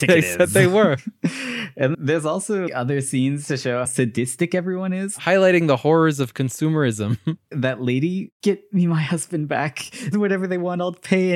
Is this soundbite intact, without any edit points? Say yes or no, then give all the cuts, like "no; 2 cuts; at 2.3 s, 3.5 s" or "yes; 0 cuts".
no; 6 cuts; at 1.9 s, 2.7 s, 3.9 s, 7.5 s, 8.4 s, 10.1 s